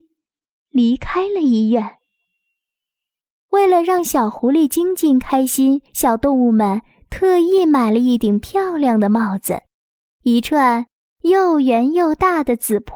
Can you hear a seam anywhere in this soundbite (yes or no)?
yes